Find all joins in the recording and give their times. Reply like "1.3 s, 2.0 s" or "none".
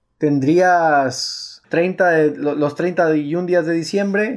1.6 s